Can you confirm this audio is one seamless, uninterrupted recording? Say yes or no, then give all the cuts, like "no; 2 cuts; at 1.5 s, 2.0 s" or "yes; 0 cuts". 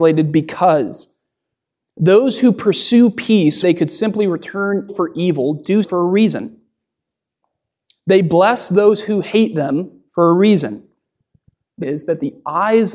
no; 4 cuts; at 3.6 s, 4.9 s, 5.8 s, 11.8 s